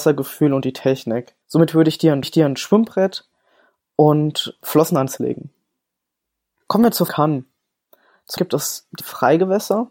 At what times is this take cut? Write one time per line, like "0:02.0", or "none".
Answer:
0:01.4
0:02.2
0:04.6
0:05.2
0:07.1
0:08.4
0:09.0